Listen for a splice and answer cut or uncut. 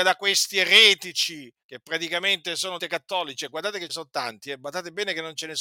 cut